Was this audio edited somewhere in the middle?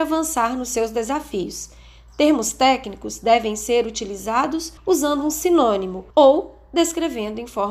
yes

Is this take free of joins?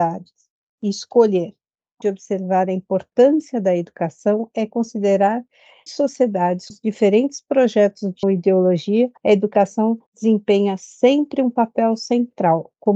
no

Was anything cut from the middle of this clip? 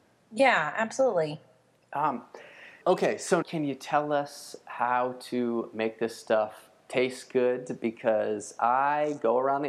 yes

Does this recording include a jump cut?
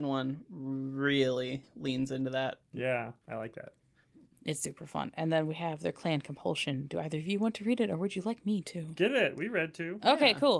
no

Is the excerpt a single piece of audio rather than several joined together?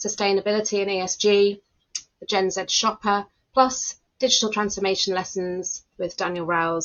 no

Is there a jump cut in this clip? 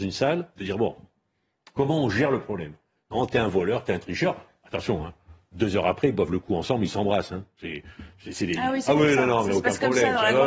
no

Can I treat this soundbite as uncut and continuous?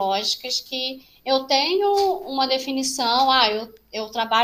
yes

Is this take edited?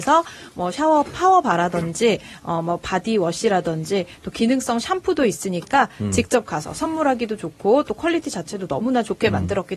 no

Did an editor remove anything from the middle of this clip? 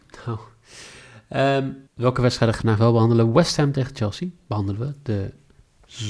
yes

